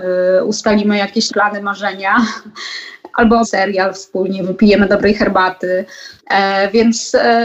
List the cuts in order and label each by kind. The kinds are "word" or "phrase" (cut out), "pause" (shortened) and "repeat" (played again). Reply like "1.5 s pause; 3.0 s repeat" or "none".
1.3 s word; 3.4 s word; 6.2 s pause